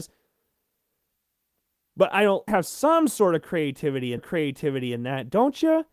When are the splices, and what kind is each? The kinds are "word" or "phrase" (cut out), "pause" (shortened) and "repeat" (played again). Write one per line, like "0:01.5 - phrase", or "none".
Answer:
0:02.5 - phrase
0:04.2 - repeat